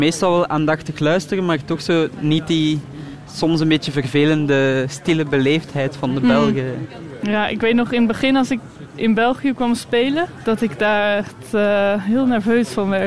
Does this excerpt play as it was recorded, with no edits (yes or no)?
yes